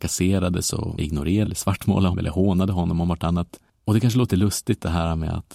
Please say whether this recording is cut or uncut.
cut